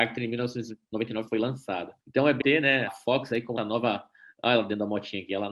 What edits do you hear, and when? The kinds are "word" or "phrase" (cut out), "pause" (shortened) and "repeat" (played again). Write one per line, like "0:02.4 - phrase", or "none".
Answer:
0:01.3 - word
0:02.0 - pause
0:02.4 - word
0:02.9 - word
0:03.6 - word